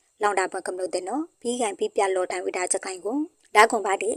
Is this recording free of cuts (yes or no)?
yes